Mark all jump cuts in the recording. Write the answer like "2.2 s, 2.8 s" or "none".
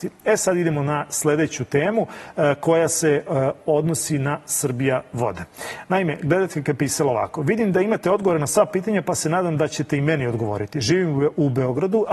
none

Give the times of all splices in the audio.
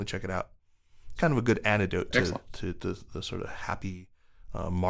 1.2 s

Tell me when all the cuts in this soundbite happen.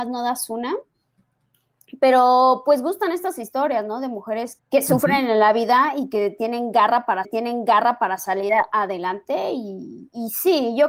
4.6 s, 7.2 s

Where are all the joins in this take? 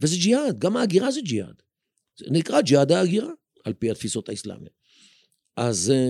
3.5 s

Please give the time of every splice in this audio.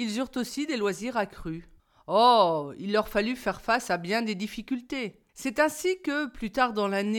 1.8 s, 5.3 s

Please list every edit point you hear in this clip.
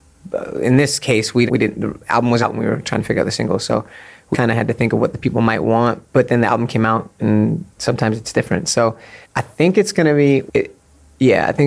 1.5 s, 2.4 s, 4.3 s, 7.7 s, 9.2 s, 10.5 s

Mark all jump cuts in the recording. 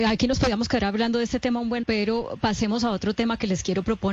1.8 s

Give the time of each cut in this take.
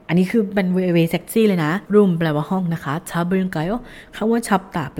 1.9 s

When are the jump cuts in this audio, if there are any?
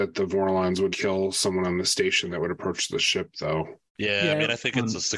0.9 s, 3.9 s

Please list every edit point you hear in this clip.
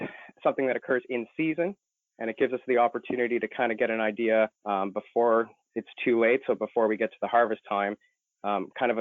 4.6 s

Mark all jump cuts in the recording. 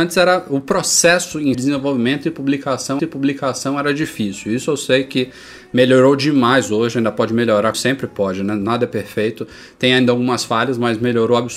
1.5 s, 3.0 s, 7.7 s

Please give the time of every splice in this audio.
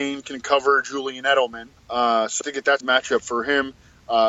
1.8 s, 2.4 s, 2.8 s

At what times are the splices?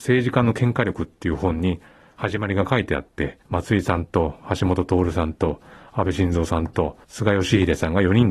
3.4 s, 7.0 s

